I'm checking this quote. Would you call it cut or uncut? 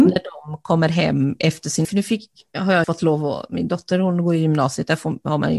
cut